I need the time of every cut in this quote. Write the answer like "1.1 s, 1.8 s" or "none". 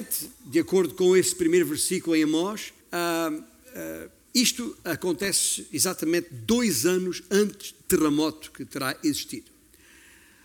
2.8 s, 7.8 s